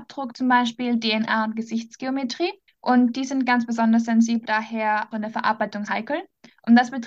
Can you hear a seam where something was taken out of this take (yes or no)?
yes